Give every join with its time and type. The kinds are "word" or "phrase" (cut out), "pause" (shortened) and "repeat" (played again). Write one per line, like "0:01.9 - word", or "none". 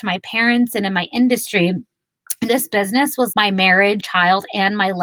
0:02.5 - word
0:03.3 - word
0:04.0 - word

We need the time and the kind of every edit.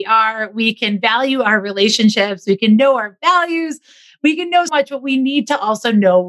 0:04.7 - word

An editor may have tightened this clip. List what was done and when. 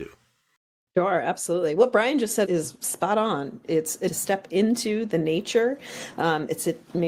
0:02.4 - word
0:04.1 - word

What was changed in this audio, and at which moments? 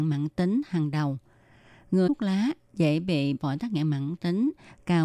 0:02.1 - word
0:03.4 - word

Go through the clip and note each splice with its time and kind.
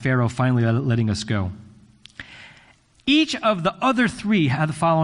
none

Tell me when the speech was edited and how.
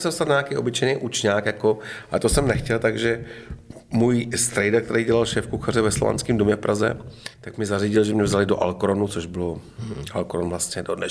0:07.3 - pause

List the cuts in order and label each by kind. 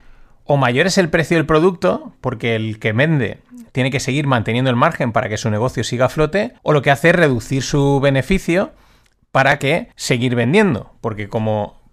0:06.6 - pause
0:09.9 - pause

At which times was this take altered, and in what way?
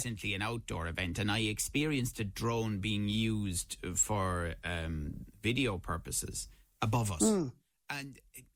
none

